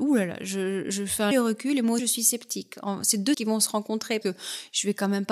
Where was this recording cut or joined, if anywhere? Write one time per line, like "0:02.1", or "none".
0:01.3
0:02.0
0:03.3
0:04.2